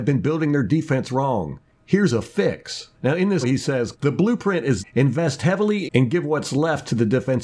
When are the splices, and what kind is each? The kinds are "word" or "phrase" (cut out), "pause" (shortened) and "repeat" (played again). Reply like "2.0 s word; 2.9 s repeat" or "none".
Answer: 2.9 s pause; 3.4 s word; 3.9 s word; 4.8 s word; 5.9 s phrase